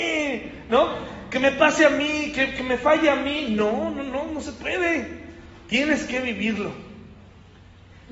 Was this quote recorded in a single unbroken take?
yes; 0 cuts

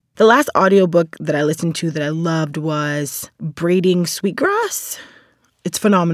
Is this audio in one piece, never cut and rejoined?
no; 1 cut; at 3.3 s

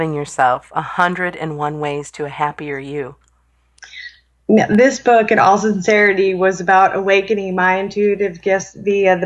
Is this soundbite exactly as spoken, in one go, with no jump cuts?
yes; 0 cuts

